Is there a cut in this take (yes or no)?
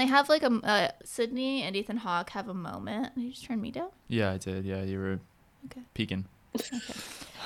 yes